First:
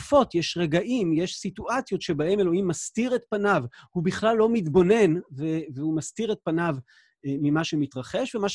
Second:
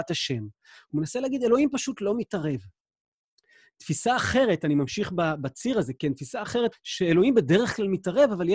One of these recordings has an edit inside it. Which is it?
second; 1 cut; at 6.7 s

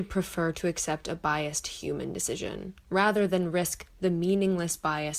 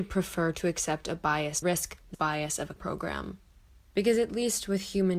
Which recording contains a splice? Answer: second; 3 cuts; at 1.6 s, 2.1 s, 2.8 s

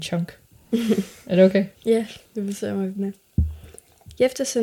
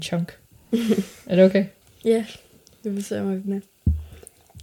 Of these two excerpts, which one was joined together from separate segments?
first; 2 cuts; at 1.8 s, 2.3 s

